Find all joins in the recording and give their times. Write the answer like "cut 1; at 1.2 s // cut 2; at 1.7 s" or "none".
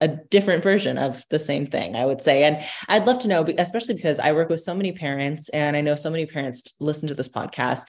none